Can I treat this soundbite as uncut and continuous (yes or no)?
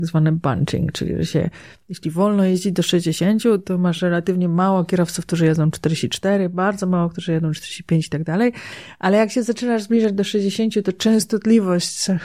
yes